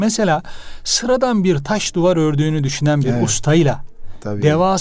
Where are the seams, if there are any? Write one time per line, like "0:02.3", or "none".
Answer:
none

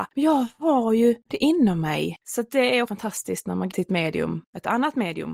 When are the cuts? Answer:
0:02.2
0:02.9
0:03.7

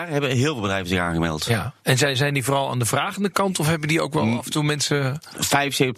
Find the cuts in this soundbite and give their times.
none

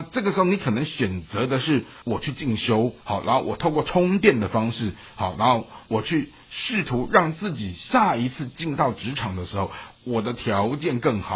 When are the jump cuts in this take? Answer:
0:02.0
0:03.0

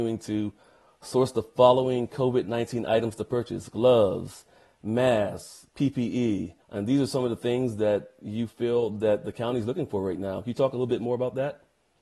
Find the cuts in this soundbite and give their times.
0:06.6

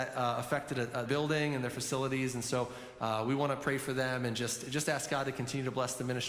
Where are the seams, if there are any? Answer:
0:01.1

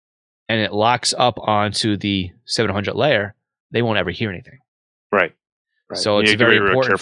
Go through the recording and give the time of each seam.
none

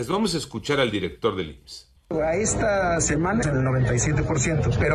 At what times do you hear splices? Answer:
0:03.4

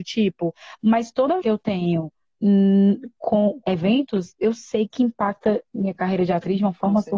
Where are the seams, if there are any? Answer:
0:01.4
0:03.6

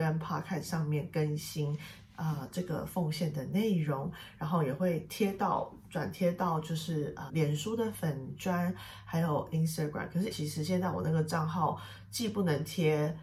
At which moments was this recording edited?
0:07.3
0:10.3

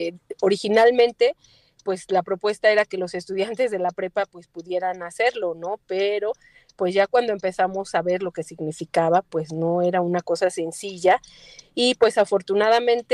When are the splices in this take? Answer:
none

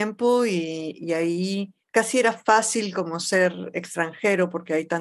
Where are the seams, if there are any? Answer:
0:01.8

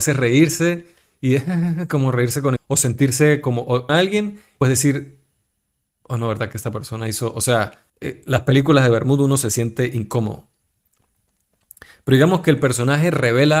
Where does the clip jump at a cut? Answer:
0:02.6
0:03.9
0:04.6
0:07.9

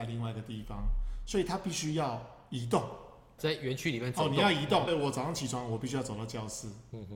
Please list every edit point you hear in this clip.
0:03.4
0:04.9

